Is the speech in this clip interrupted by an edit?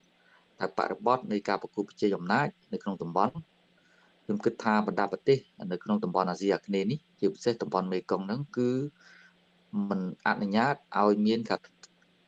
no; 0 cuts

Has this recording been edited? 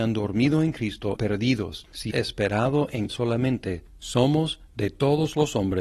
yes; 3 cuts; at 1.2 s, 2.1 s, 3.1 s

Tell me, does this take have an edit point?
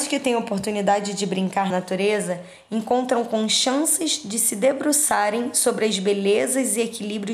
yes; 1 cut; at 1.7 s

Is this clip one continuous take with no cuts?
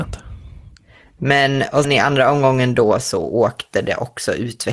no; 1 cut; at 1.8 s

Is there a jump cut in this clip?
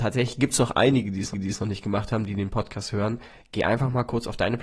yes; 1 cut; at 1.3 s

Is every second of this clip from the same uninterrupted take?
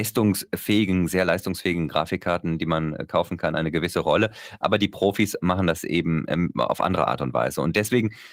yes; 0 cuts

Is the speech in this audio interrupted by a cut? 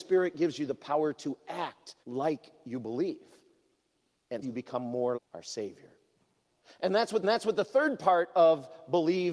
yes; 4 cuts; at 2.0 s, 4.4 s, 5.1 s, 7.2 s

